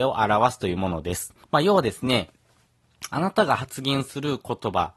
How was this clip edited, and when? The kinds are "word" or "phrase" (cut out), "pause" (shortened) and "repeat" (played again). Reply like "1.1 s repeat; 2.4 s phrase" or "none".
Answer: 1.4 s pause